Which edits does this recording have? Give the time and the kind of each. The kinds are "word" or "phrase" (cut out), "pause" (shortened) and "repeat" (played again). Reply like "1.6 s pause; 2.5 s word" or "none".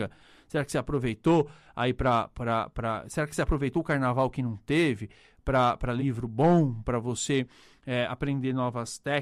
6.0 s word

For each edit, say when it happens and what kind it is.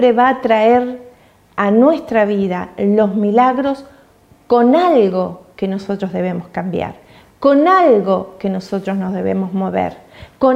none

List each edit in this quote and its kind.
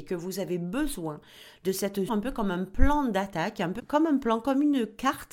2.1 s word; 3.8 s phrase

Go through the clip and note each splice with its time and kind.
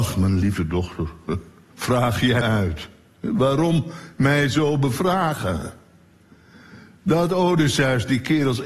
1.7 s word; 2.4 s word

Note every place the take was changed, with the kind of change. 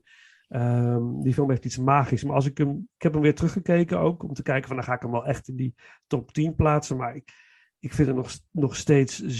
none

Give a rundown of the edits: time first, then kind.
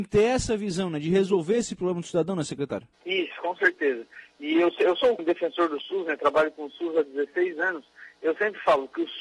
2.9 s pause; 5.2 s phrase

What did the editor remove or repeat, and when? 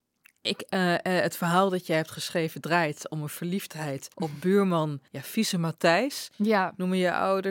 4.1 s pause; 5.1 s pause

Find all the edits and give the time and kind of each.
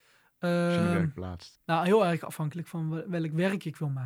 1.5 s pause

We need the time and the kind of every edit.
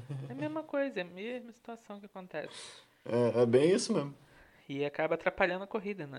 none

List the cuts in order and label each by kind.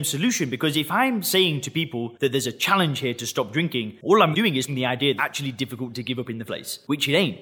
4.3 s word; 4.7 s word; 5.2 s word; 6.5 s word

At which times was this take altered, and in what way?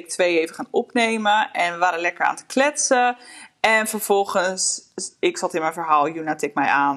none

